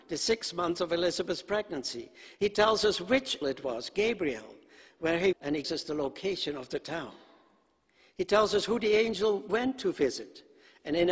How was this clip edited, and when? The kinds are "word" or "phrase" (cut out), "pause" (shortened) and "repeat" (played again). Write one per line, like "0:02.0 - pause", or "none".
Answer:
0:03.4 - word
0:05.3 - word
0:05.6 - word